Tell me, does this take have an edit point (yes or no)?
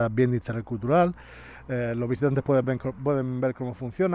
no